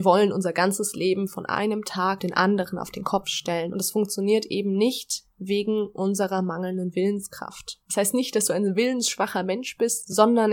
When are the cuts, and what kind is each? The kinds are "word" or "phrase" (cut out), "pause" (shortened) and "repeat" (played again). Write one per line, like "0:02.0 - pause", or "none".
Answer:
0:02.2 - word
0:07.8 - pause